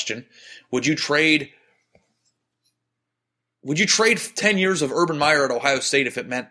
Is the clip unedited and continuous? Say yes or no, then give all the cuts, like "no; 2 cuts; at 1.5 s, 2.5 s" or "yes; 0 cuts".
yes; 0 cuts